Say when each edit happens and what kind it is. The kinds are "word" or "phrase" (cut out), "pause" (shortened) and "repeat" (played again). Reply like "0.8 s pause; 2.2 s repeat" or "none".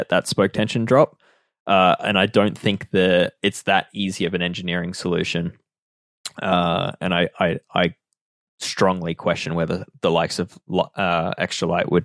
none